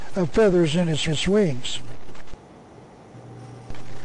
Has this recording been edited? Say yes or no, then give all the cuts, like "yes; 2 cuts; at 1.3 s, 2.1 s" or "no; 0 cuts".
yes; 1 cut; at 1.1 s